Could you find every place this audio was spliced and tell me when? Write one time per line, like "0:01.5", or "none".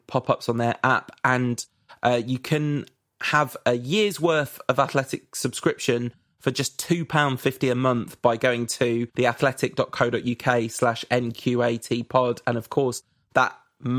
0:09.1